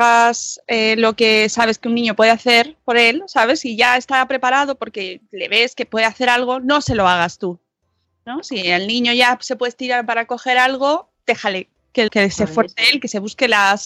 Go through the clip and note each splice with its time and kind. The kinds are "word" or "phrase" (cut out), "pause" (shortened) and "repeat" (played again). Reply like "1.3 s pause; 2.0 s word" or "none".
12.1 s word

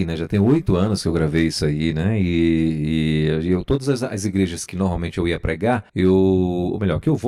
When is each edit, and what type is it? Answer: 5.9 s pause

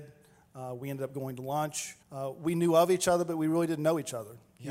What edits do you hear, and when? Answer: 2.0 s pause

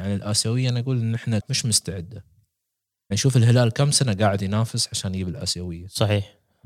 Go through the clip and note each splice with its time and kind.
1.4 s word; 3.1 s word

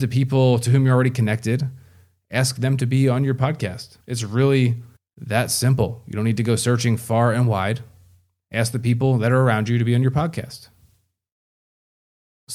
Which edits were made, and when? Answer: 4.0 s pause; 5.0 s pause

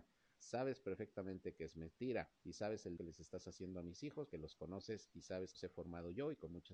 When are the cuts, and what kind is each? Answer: 2.3 s pause; 3.0 s word; 4.3 s word; 5.5 s phrase

